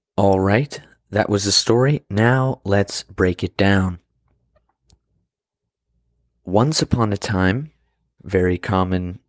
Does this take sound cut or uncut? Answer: uncut